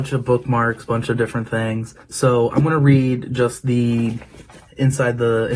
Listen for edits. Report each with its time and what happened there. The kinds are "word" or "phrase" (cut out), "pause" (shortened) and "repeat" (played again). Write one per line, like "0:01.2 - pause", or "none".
0:02.0 - pause